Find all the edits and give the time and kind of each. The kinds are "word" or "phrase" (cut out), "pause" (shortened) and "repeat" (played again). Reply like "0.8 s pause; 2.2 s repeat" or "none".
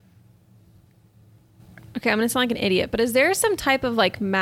none